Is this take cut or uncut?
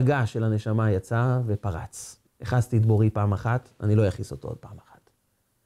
cut